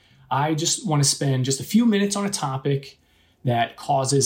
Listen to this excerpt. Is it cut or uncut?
uncut